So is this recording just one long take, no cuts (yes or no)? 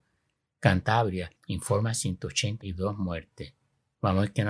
no